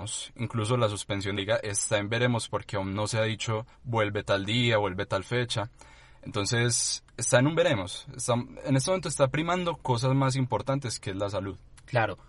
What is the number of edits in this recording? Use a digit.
2